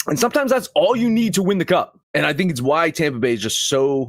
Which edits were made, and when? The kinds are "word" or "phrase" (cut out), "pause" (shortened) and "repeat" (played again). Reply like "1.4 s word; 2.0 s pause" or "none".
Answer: 2.0 s pause